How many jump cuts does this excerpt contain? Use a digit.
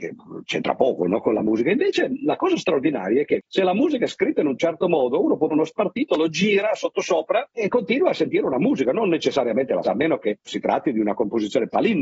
4